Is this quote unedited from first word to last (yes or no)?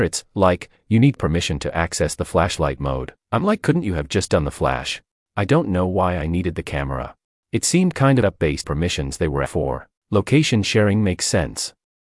no